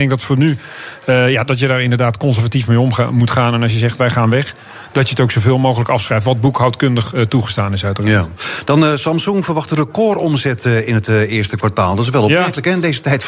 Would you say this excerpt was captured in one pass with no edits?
yes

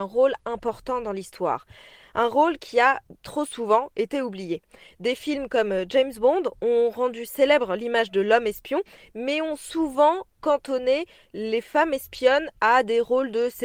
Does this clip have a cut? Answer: no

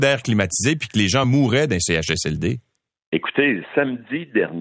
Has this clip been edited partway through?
no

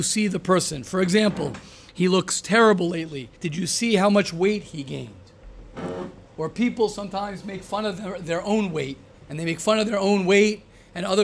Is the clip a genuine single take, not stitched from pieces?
no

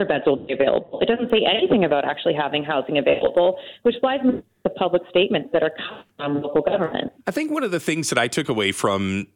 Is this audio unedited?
no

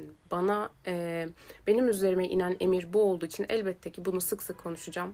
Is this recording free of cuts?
yes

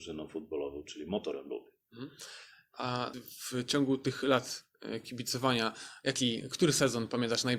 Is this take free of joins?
no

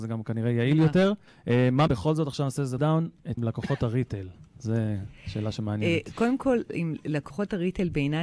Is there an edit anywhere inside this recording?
yes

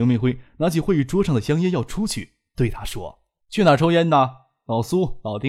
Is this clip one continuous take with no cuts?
no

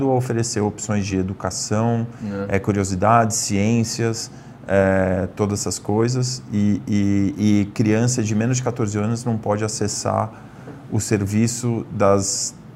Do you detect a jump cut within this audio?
no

